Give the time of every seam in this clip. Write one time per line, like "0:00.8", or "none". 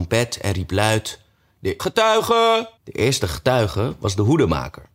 0:01.8
0:02.8